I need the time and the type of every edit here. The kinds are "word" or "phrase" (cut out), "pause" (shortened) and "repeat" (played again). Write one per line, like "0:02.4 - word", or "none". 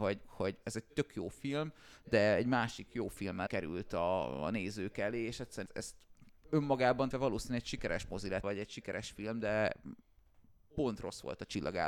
0:03.5 - word
0:05.7 - word
0:07.1 - word
0:08.4 - word